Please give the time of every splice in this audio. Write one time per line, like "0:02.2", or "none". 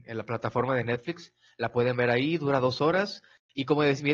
none